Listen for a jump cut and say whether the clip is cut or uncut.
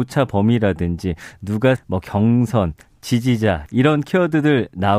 cut